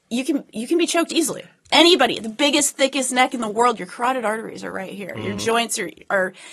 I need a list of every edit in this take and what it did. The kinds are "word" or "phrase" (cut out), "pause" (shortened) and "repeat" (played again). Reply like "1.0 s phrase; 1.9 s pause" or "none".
none